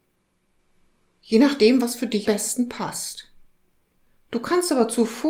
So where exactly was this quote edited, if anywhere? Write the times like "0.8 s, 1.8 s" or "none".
2.2 s